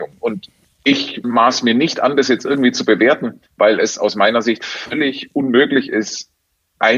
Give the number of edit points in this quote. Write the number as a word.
two